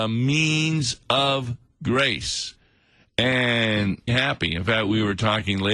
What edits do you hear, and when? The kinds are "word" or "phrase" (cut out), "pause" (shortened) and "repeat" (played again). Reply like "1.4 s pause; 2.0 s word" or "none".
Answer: 4.1 s phrase